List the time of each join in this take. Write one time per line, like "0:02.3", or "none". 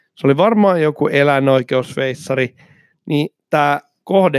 none